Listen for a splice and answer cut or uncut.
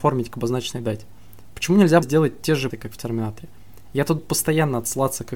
cut